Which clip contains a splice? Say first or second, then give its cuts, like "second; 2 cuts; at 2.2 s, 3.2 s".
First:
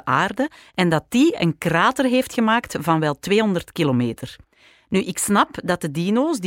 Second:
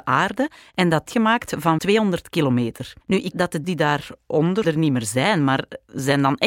second; 6 cuts; at 1.1 s, 1.8 s, 3.0 s, 3.3 s, 3.6 s, 4.6 s